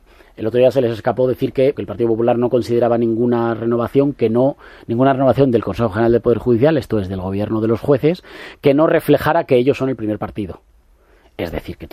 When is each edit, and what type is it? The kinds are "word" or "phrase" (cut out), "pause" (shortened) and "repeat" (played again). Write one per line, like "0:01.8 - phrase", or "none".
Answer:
0:01.7 - word